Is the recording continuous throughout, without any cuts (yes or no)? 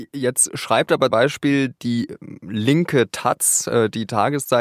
no